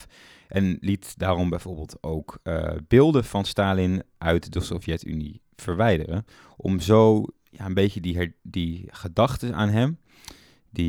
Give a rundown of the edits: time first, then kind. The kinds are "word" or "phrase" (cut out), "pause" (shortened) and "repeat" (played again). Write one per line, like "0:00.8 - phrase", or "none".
none